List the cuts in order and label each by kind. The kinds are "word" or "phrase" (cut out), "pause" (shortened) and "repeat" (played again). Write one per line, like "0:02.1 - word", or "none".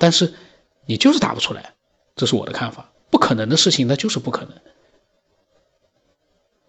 none